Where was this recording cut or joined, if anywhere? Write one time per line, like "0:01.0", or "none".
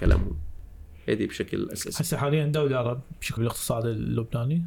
0:03.4